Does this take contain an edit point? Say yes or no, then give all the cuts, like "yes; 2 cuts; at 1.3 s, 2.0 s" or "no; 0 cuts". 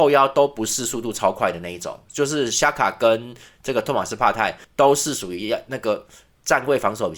yes; 1 cut; at 4.6 s